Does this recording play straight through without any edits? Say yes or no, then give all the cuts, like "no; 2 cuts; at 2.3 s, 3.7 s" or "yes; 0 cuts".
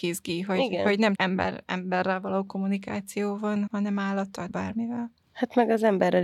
no; 3 cuts; at 1.1 s, 3.7 s, 4.5 s